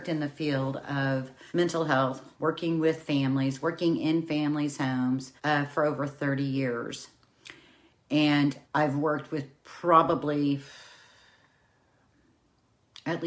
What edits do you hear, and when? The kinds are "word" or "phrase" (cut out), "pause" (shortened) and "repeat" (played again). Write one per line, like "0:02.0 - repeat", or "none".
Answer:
0:01.5 - pause
0:02.3 - pause
0:05.4 - pause
0:08.6 - pause